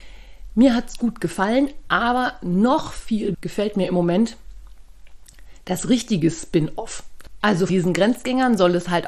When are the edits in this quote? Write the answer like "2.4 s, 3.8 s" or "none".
3.3 s, 7.7 s